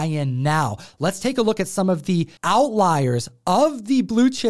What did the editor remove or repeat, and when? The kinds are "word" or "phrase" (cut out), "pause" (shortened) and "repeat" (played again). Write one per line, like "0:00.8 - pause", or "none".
0:02.4 - pause